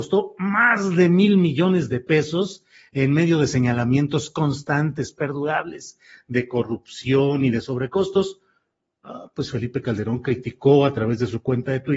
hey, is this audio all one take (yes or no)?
yes